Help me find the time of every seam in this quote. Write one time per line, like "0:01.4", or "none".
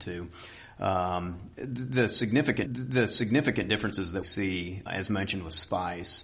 0:02.7
0:04.2
0:04.9